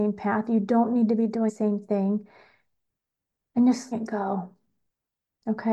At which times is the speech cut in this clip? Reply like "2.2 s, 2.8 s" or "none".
1.5 s, 3.9 s

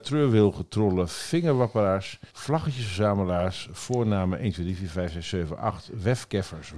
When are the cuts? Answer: 2.3 s

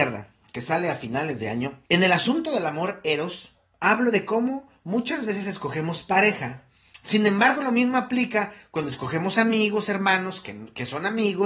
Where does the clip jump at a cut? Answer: 1.8 s

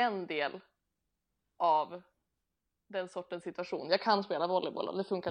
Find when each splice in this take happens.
none

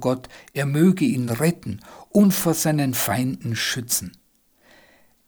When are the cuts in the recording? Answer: none

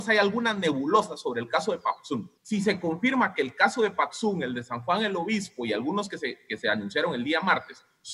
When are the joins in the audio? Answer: 2.4 s

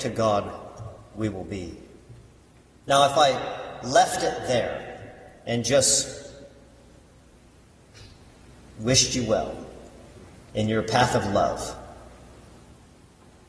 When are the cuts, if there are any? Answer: none

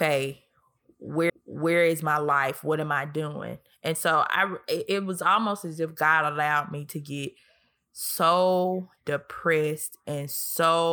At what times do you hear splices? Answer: 1.3 s

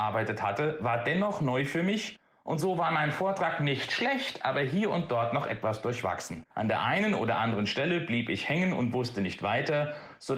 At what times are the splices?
6.5 s

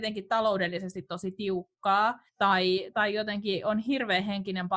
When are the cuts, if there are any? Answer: 2.3 s

